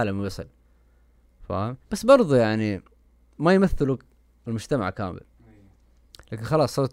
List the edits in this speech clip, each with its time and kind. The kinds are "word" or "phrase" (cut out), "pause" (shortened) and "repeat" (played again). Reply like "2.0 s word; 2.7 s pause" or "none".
1.8 s pause